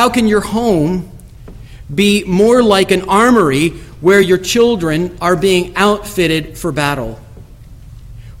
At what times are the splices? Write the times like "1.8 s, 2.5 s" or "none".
none